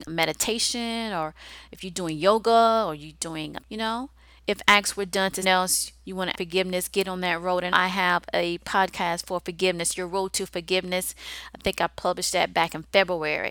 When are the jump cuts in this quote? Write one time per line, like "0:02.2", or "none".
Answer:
0:03.6
0:05.4
0:06.3
0:07.7